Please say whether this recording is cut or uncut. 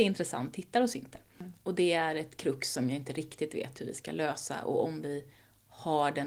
uncut